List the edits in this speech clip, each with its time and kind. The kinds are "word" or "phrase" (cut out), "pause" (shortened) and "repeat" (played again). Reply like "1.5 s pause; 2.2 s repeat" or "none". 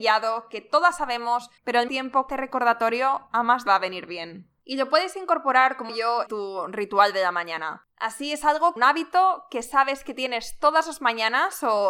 1.6 s pause; 1.9 s word; 2.3 s phrase; 3.7 s phrase; 4.6 s pause; 5.9 s word; 6.3 s word; 7.9 s pause; 8.8 s phrase